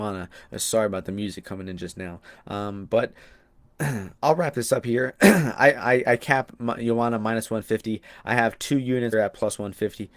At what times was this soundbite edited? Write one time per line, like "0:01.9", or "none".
0:09.1